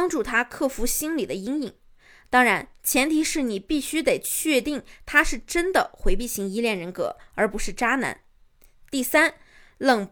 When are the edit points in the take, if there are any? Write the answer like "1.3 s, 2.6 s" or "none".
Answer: none